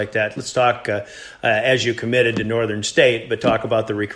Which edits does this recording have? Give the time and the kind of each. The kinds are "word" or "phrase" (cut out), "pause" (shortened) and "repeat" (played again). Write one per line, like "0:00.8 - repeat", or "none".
none